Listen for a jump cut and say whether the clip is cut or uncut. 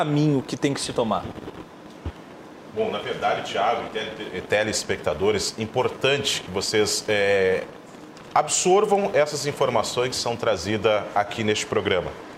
uncut